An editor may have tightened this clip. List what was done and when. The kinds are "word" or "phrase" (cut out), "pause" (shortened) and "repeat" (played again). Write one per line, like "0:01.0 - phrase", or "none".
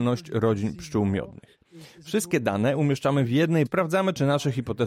0:03.7 - phrase